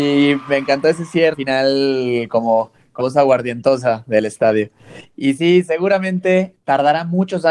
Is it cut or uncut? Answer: cut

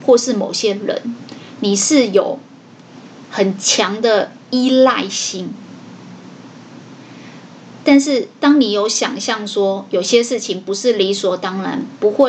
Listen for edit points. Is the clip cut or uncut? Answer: cut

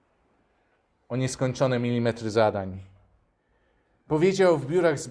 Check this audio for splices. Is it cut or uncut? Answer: uncut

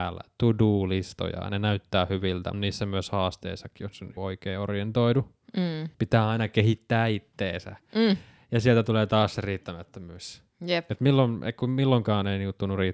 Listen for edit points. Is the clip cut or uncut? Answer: cut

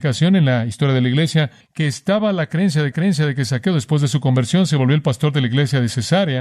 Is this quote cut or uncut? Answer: cut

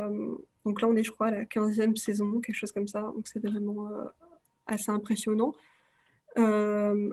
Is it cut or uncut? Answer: uncut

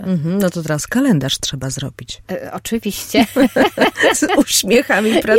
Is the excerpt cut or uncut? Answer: uncut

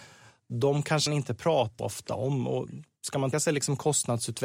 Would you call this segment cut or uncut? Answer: cut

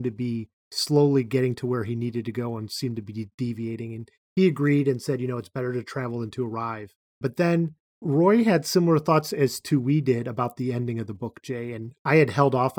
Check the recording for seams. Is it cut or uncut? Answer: uncut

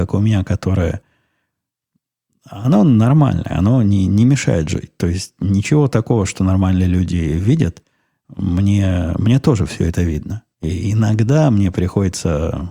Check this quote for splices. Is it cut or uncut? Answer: uncut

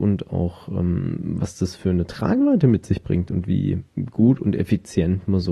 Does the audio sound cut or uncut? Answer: uncut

